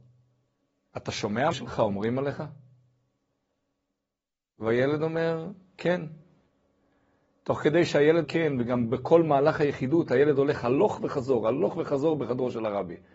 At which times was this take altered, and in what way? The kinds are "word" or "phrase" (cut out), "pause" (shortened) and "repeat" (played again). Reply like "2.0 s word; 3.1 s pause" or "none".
1.5 s phrase; 8.2 s word